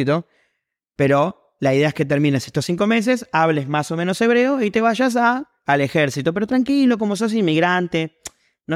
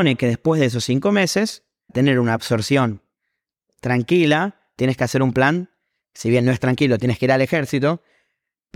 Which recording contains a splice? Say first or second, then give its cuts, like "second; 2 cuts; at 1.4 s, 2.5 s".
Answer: second; 1 cut; at 1.9 s